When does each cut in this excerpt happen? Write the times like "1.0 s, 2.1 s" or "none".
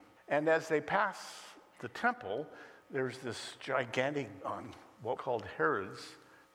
4.4 s, 5.2 s